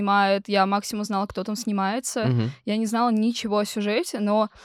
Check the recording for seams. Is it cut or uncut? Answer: uncut